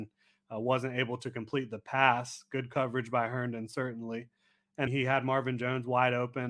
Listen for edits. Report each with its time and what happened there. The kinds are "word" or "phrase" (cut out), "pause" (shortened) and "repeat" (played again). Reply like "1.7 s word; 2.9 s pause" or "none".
4.9 s word